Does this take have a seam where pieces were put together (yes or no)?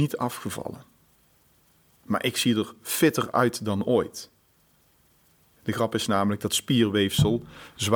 no